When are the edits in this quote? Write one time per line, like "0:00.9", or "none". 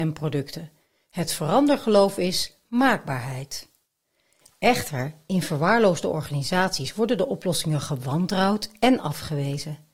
none